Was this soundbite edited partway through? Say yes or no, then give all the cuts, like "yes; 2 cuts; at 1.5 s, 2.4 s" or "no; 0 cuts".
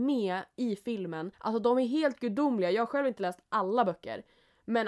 yes; 1 cut; at 1.3 s